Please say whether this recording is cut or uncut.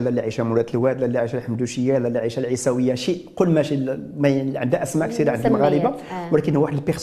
uncut